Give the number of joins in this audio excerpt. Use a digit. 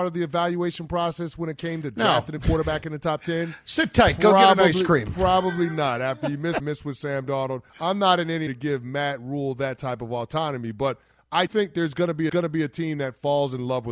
5